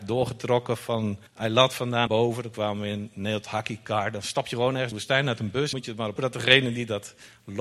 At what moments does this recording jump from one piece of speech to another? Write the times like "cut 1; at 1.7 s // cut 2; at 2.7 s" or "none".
cut 1; at 1.3 s // cut 2; at 2.1 s // cut 3; at 4.9 s // cut 4; at 5.7 s // cut 5; at 6.2 s